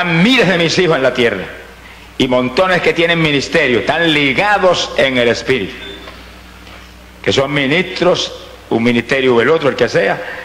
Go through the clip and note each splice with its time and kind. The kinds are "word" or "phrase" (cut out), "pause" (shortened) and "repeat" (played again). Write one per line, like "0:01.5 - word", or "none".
none